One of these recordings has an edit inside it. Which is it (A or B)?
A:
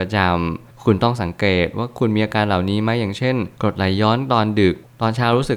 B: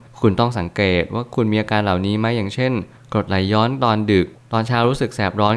A